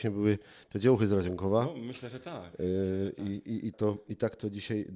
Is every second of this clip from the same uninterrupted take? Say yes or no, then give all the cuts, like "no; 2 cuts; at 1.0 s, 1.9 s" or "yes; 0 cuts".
no; 1 cut; at 3.7 s